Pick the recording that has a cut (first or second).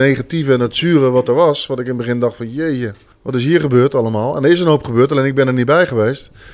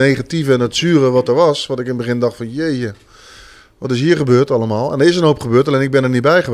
first